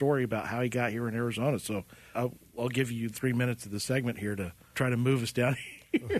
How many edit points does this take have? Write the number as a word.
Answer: three